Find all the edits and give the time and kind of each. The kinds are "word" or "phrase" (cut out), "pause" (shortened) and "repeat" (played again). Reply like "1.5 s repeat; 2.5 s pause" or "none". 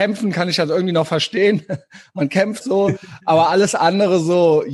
2.6 s word

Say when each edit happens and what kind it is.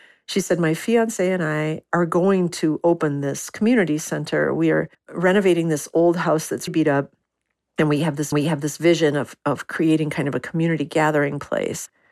4.9 s pause; 6.7 s word; 8.3 s repeat

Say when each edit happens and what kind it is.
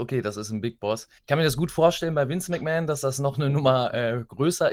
1.2 s pause

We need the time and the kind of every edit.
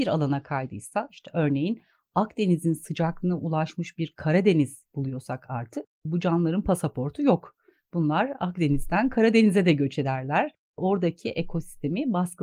none

